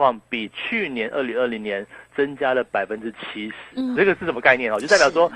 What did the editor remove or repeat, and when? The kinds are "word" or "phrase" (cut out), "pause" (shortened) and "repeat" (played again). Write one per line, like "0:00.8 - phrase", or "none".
0:04.0 - word